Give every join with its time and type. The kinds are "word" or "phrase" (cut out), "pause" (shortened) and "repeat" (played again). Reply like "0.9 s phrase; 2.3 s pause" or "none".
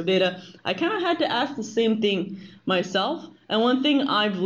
none